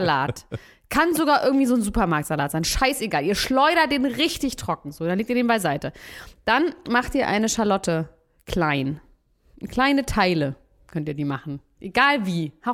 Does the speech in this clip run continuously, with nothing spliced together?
yes; 0 cuts

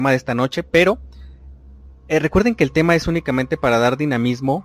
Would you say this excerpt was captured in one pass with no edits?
yes; 0 cuts

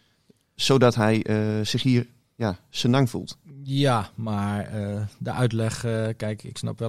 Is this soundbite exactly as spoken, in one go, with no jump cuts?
yes; 0 cuts

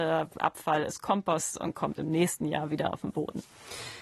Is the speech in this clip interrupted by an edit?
no; 0 cuts

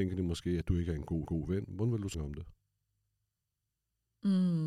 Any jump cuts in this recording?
yes; 2 cuts; at 1.3 s, 2.1 s

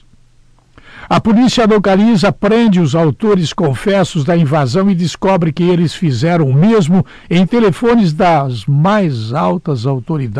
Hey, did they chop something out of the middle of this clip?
no; 0 cuts

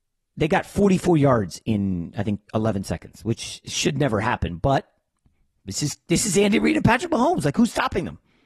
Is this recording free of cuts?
no; 1 cut; at 2.5 s

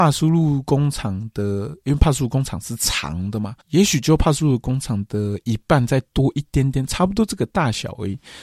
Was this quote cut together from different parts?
yes; 1 cut; at 3.6 s

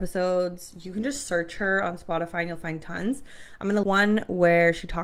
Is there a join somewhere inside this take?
yes; 1 cut; at 3.8 s

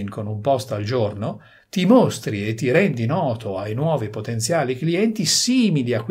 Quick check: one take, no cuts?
yes; 0 cuts

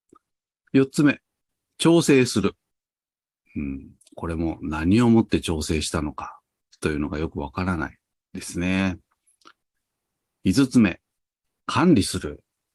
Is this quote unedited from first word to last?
yes; 0 cuts

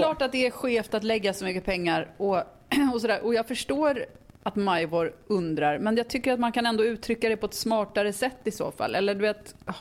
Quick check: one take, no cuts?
yes; 0 cuts

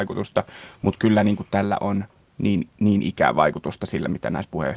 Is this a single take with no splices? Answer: yes; 0 cuts

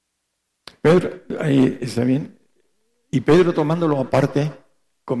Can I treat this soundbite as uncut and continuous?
yes; 0 cuts

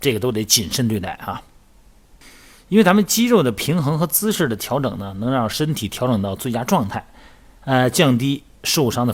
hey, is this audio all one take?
yes; 0 cuts

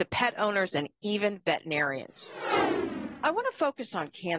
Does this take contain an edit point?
no; 0 cuts

